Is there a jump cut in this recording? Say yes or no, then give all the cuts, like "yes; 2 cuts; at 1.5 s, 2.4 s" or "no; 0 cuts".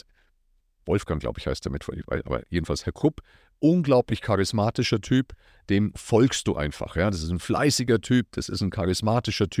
no; 0 cuts